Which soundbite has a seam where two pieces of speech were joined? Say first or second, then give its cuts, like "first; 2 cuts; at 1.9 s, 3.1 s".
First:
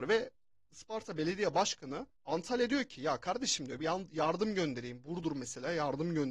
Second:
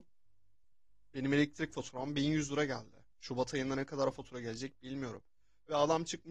first; 1 cut; at 2.1 s